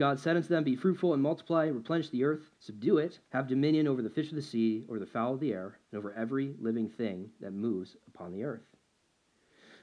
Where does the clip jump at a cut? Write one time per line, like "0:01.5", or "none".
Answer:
0:02.5
0:03.2
0:05.8

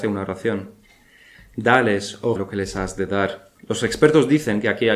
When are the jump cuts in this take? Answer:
0:02.3

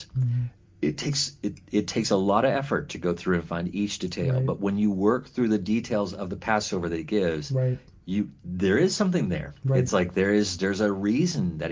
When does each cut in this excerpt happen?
none

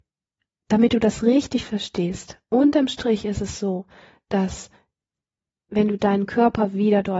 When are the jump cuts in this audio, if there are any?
none

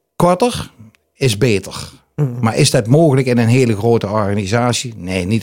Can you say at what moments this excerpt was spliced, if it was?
none

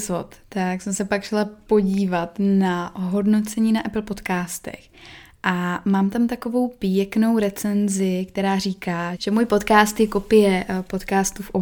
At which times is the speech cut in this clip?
0:09.2

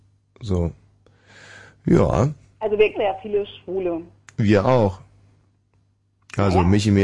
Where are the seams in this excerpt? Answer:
0:02.9

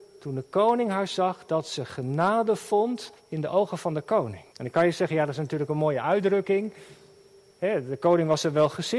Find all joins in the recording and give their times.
0:03.2
0:04.5

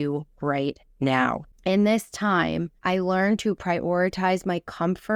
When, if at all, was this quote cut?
0:01.5
0:02.8

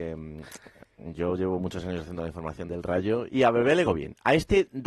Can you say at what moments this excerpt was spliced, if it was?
0:02.7
0:03.3
0:03.8

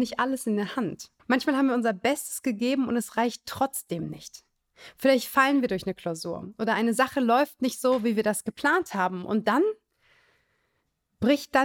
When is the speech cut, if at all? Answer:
0:01.2

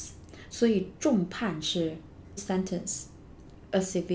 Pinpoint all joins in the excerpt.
0:02.4

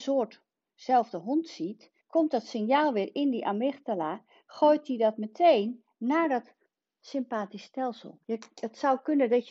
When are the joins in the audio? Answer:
0:02.0
0:08.2

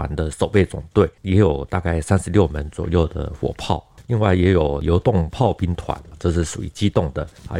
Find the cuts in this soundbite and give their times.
0:01.2

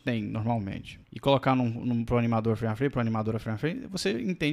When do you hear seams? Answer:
0:01.0

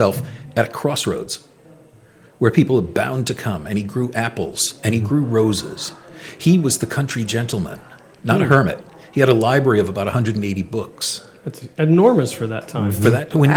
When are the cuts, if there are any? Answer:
none

